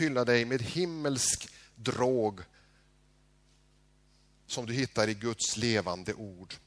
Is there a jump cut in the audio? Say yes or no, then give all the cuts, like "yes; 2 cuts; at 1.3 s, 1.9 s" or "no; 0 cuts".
no; 0 cuts